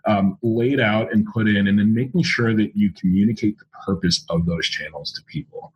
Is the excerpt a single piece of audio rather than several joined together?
yes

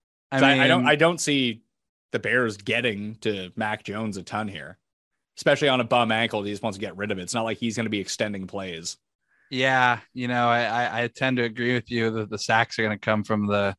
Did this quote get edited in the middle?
no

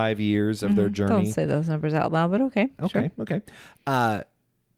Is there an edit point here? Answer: no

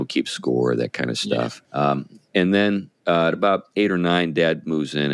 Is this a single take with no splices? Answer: no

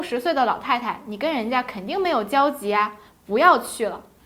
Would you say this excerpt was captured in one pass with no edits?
yes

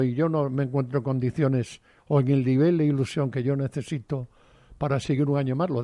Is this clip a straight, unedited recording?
yes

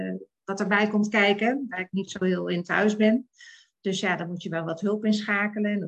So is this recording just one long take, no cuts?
yes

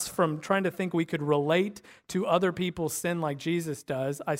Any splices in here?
no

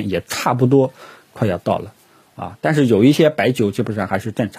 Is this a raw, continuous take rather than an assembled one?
yes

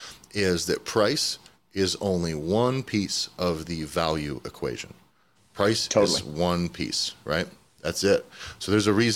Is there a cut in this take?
no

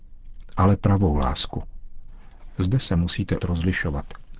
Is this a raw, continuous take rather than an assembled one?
no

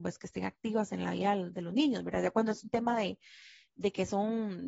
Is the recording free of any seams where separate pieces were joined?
yes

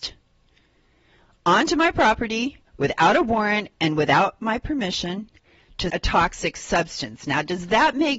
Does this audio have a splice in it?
yes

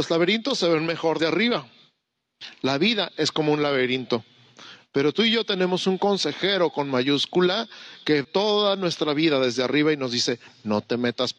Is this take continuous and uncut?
no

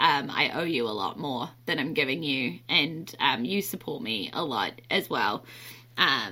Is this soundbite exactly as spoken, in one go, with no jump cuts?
yes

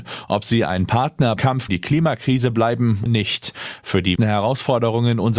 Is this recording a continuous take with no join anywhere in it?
no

